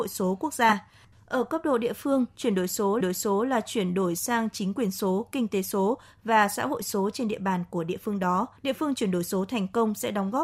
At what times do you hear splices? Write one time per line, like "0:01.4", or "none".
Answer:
0:01.1
0:03.0
0:08.6